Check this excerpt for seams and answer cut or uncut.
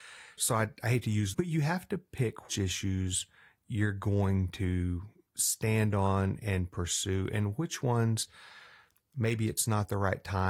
cut